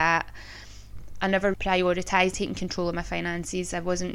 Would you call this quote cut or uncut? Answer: cut